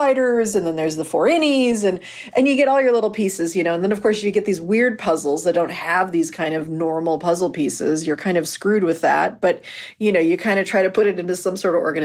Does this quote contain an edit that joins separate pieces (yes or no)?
no